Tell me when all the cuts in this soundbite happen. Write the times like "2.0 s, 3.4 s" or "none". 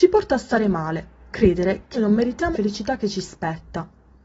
1.3 s, 1.9 s, 2.5 s